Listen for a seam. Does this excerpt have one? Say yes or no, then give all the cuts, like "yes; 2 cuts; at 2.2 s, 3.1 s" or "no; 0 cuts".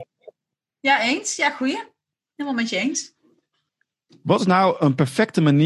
no; 0 cuts